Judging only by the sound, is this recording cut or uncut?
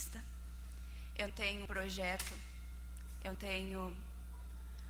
cut